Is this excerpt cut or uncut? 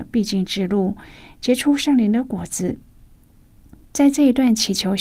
uncut